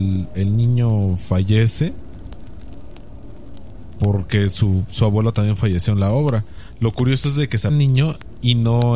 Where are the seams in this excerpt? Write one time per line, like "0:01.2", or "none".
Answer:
0:07.7